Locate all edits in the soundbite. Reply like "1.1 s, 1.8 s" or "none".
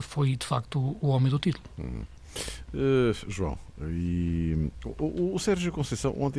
none